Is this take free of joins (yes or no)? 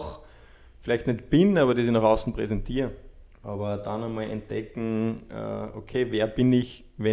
no